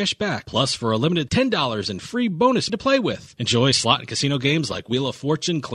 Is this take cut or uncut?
cut